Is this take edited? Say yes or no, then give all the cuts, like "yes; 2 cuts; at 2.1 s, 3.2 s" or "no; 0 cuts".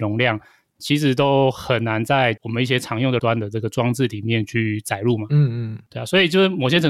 yes; 1 cut; at 3.2 s